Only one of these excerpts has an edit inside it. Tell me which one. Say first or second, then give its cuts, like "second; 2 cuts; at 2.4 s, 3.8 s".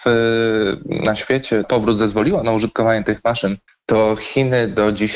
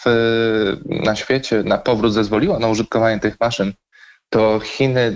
first; 2 cuts; at 1.6 s, 3.7 s